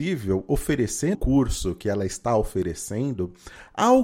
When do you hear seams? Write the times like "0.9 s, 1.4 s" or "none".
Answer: 1.1 s